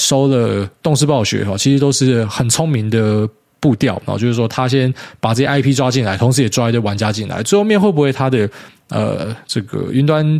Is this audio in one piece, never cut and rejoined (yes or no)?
yes